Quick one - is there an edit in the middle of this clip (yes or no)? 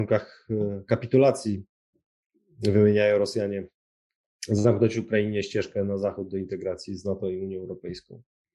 no